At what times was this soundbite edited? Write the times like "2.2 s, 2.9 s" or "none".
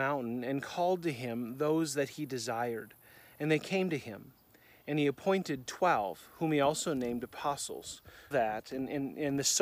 8.3 s